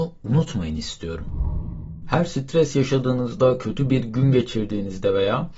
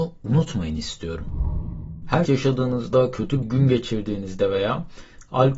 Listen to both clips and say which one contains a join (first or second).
second